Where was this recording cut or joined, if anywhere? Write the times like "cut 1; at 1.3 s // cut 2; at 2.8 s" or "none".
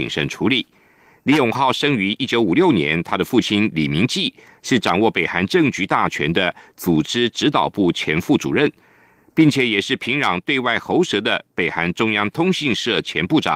none